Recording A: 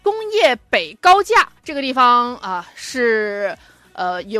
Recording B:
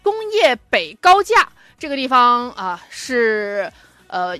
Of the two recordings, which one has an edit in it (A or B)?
A